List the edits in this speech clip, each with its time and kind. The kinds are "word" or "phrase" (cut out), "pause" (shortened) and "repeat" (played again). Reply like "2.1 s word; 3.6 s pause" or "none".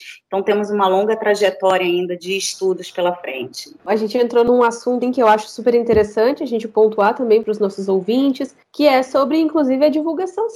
3.8 s pause; 5.0 s word